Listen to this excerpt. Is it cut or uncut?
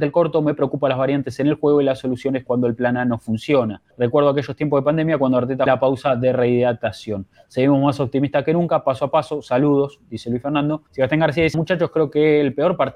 cut